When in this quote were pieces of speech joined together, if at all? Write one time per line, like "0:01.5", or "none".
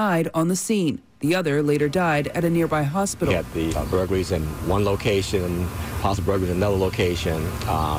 0:03.7
0:06.0